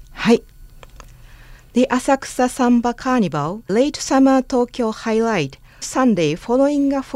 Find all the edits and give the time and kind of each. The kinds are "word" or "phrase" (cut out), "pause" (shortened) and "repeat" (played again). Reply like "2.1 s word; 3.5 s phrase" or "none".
3.7 s word; 5.8 s word